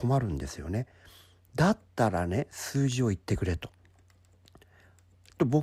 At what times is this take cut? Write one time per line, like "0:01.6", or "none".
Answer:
none

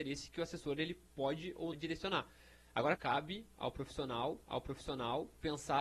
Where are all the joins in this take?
0:01.1
0:01.7
0:03.0
0:04.4

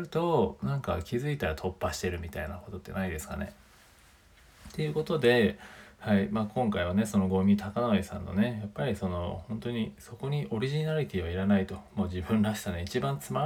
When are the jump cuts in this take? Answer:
none

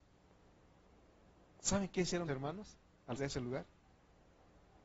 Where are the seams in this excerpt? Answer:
0:02.3
0:03.2

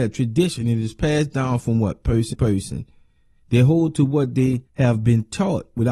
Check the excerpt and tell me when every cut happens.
0:02.3
0:04.7

